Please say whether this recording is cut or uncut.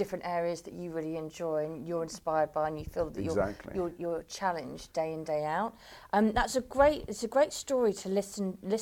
uncut